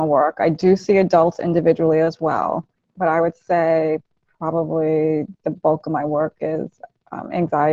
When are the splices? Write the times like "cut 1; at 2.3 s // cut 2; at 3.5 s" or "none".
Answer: cut 1; at 2.7 s